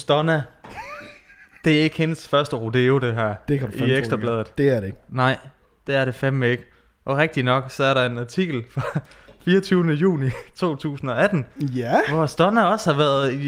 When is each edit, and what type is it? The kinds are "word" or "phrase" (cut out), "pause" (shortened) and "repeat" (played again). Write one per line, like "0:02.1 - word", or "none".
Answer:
none